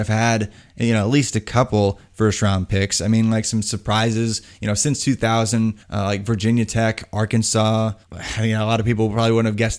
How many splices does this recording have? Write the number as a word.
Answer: two